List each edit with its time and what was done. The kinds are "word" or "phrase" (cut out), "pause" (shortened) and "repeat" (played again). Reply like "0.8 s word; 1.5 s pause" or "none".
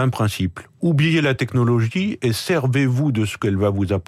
none